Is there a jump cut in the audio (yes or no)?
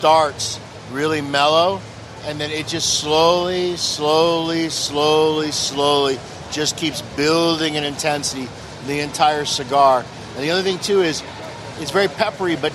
no